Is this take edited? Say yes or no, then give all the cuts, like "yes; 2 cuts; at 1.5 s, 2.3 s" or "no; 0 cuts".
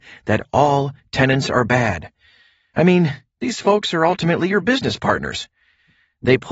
no; 0 cuts